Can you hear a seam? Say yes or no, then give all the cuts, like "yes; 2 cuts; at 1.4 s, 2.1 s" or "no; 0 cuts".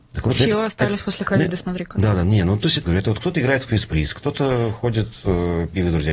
yes; 1 cut; at 2.8 s